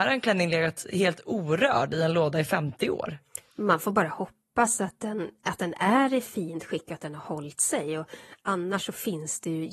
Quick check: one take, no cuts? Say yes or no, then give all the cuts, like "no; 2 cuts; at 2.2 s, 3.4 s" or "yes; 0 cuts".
yes; 0 cuts